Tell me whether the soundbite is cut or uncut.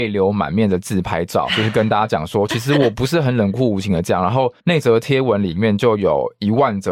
cut